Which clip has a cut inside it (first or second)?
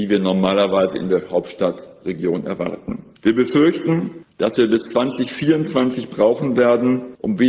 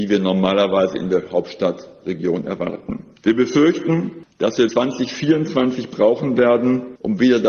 second